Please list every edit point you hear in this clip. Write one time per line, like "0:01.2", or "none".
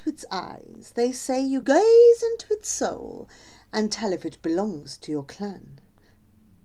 0:01.6